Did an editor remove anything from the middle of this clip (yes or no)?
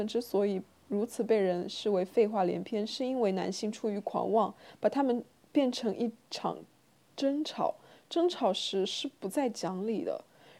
no